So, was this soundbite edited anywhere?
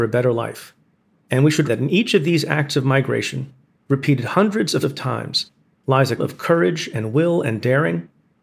yes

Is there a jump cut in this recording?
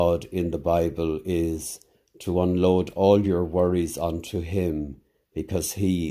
no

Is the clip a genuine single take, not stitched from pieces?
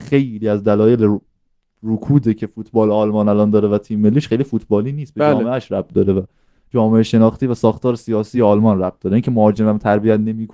yes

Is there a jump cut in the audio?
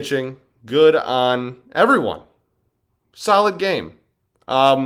no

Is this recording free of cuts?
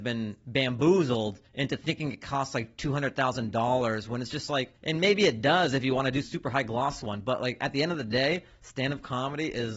no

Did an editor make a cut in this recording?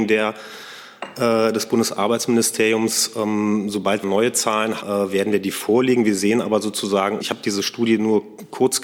yes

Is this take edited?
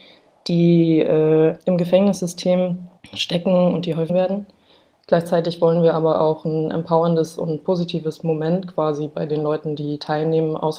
yes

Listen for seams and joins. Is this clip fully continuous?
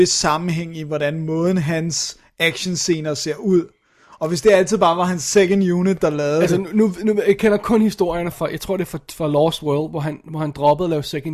no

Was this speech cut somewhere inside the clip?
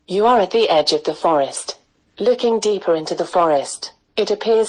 no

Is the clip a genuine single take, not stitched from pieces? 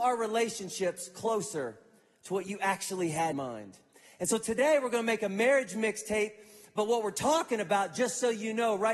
no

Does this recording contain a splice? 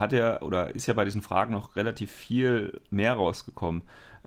no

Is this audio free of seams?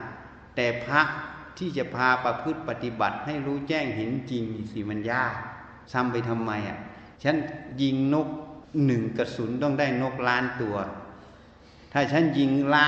no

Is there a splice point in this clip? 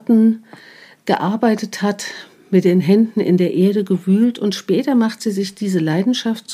no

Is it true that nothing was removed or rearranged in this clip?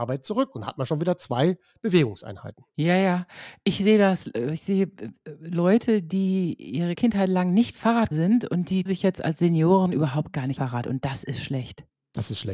no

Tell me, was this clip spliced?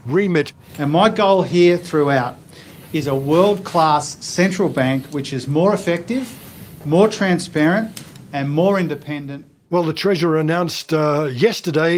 no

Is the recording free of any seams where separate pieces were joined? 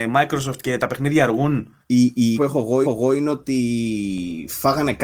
no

